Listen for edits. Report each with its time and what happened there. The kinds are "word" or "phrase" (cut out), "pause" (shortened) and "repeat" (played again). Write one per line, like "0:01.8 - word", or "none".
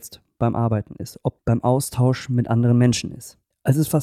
0:01.4 - word